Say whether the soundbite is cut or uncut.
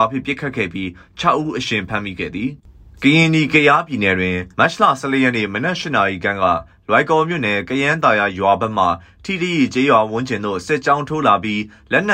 cut